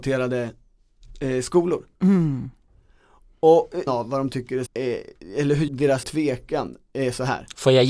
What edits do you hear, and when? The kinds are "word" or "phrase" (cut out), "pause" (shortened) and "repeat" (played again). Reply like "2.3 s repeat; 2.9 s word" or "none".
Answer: 1.9 s pause; 3.9 s word; 4.7 s word; 5.7 s phrase; 6.0 s word